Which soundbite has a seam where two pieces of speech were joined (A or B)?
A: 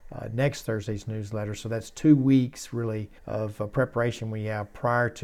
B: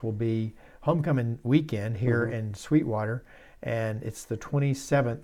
A